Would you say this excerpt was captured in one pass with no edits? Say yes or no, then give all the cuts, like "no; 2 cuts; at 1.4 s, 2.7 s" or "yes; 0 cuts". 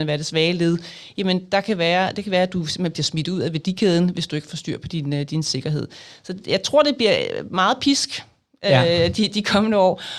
yes; 0 cuts